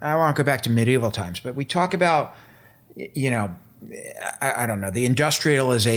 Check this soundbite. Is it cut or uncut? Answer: uncut